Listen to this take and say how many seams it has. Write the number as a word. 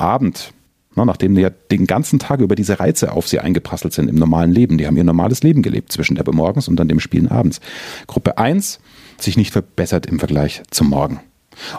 three